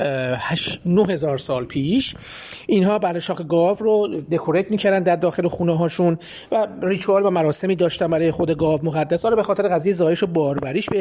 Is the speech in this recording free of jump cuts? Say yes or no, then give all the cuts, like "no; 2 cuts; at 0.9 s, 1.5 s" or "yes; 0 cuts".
yes; 0 cuts